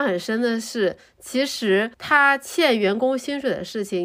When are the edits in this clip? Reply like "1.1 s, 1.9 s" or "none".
1.9 s